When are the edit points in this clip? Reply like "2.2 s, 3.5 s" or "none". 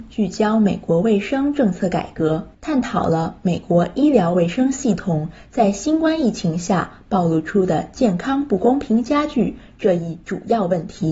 2.5 s